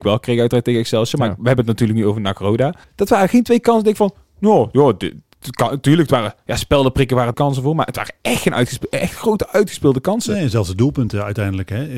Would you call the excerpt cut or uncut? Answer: cut